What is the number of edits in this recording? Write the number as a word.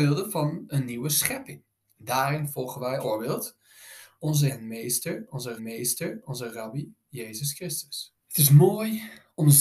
five